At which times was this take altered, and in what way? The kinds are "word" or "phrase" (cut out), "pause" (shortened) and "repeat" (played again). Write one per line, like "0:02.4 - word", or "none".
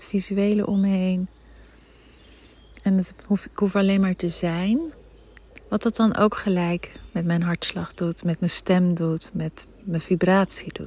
0:05.6 - pause